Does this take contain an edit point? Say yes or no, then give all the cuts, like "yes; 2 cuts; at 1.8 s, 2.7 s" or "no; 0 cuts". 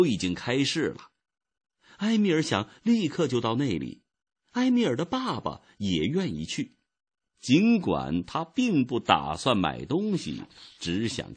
no; 0 cuts